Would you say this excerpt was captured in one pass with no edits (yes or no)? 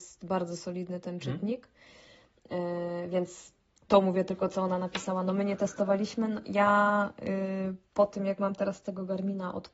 yes